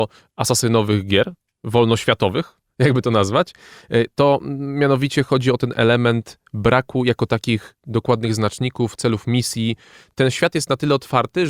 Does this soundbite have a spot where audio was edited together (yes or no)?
no